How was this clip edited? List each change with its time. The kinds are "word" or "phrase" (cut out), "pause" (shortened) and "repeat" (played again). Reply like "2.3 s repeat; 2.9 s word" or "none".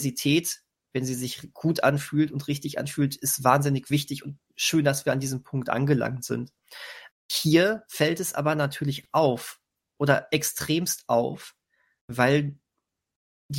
none